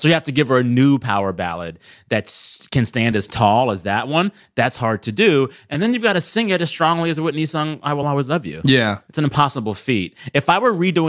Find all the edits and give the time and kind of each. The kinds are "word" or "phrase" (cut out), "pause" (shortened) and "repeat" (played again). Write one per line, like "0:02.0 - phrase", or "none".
none